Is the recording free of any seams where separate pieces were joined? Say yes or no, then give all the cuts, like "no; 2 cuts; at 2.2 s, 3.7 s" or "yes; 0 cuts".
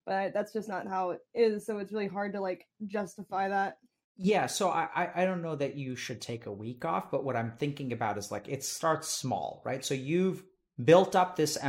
yes; 0 cuts